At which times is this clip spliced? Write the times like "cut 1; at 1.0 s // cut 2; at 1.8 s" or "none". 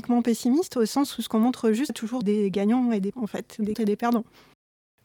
cut 1; at 1.9 s // cut 2; at 2.2 s // cut 3; at 3.1 s // cut 4; at 3.7 s